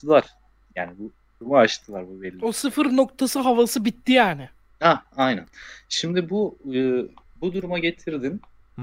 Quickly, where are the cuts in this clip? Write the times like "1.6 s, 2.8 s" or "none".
none